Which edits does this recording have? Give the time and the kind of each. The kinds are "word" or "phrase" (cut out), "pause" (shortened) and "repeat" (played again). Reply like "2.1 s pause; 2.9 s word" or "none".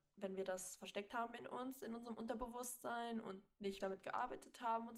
3.8 s word